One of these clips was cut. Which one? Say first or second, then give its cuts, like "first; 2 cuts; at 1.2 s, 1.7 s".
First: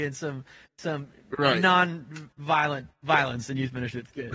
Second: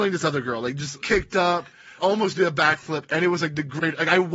second; 2 cuts; at 1.0 s, 2.0 s